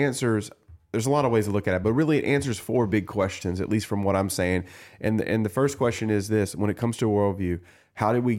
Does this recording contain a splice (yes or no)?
no